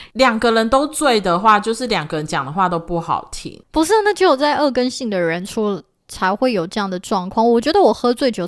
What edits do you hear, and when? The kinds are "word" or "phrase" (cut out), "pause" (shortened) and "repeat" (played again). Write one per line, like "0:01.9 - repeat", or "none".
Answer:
0:03.6 - pause